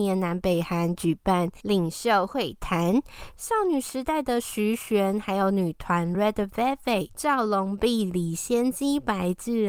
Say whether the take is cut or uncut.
uncut